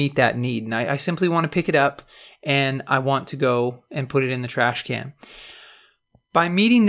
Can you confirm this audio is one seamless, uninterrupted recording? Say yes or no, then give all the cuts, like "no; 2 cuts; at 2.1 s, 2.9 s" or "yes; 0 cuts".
yes; 0 cuts